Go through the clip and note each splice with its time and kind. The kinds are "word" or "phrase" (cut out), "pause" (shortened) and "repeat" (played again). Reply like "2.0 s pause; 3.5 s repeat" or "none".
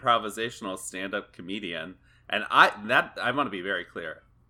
none

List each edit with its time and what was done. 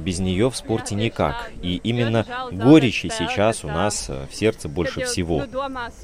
none

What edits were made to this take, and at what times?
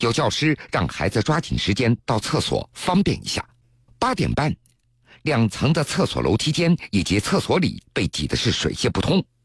3.9 s pause

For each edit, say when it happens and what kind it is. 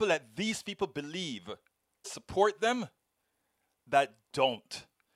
2.0 s word

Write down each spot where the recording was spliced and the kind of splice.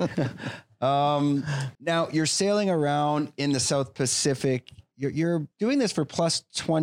1.7 s pause; 5.5 s pause

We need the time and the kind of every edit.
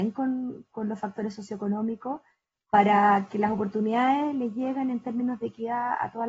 none

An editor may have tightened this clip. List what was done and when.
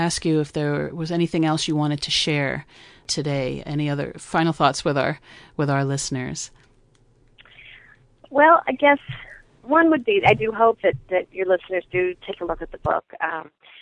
none

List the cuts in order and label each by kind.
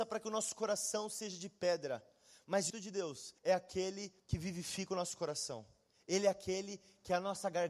2.7 s word; 3.4 s pause; 4.2 s pause

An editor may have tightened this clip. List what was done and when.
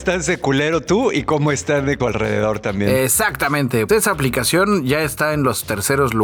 2.0 s phrase; 3.9 s word

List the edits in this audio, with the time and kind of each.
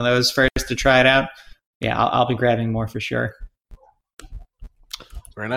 none

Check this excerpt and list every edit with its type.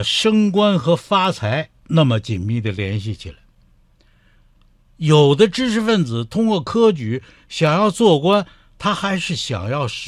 1.8 s pause

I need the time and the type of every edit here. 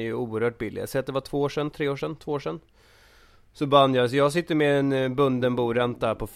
none

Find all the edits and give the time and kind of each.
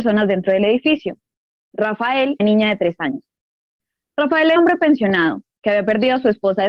2.4 s phrase; 4.6 s word

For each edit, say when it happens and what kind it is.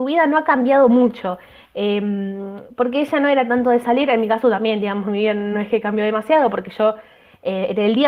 none

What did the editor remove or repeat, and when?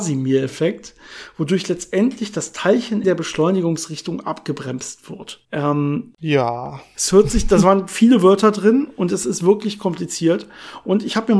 3.0 s word; 5.4 s pause

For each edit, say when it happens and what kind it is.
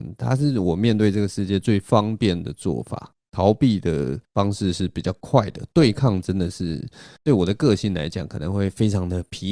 4.2 s pause; 7.2 s pause

